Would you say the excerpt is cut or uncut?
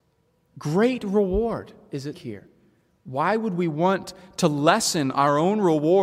cut